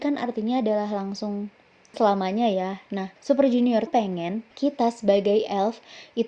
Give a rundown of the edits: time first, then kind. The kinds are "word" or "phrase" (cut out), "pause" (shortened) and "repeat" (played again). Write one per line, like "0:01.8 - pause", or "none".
0:01.9 - word
0:03.2 - pause
0:03.9 - word
0:04.5 - pause